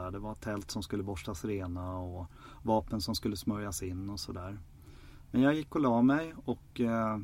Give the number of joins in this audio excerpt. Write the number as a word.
zero